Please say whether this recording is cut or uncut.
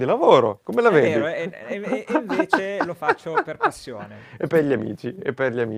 uncut